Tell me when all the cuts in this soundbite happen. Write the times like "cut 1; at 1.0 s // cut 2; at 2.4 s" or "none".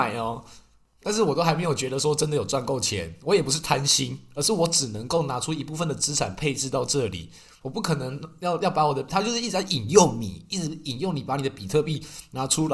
none